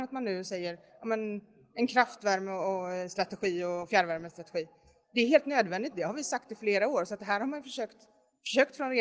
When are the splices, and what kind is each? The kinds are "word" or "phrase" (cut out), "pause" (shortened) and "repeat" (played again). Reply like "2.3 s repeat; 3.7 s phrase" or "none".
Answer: none